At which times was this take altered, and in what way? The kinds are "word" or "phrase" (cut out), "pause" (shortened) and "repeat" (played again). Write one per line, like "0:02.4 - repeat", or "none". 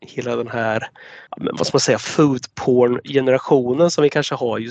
0:01.3 - pause